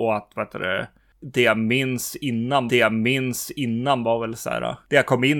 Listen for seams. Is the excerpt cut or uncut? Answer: cut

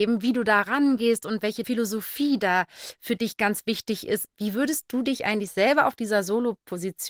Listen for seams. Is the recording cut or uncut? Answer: uncut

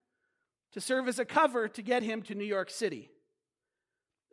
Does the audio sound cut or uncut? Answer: uncut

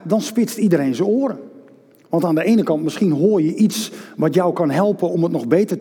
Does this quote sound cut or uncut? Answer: uncut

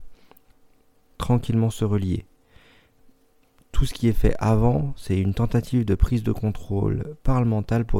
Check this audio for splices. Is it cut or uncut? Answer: uncut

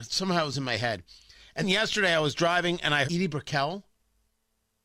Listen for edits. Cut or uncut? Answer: cut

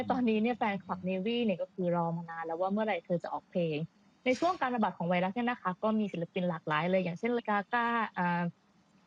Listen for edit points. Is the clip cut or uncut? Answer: cut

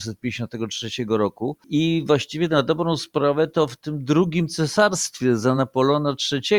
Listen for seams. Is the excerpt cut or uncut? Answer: uncut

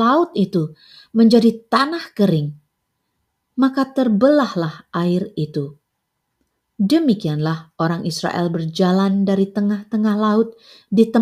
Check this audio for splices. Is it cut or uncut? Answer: uncut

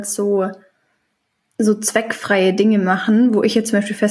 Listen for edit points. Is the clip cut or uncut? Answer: uncut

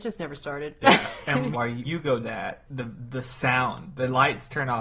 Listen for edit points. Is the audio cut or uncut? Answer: cut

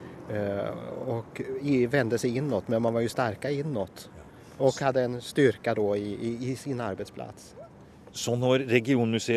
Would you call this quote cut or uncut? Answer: uncut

